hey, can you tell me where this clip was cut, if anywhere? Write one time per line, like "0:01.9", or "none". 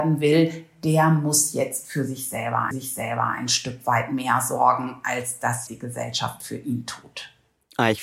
0:02.7
0:05.7